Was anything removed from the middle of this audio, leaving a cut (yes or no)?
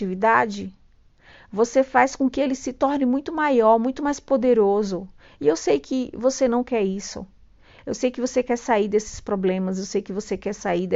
no